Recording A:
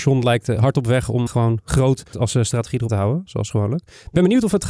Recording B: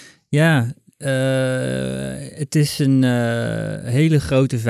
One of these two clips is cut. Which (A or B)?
A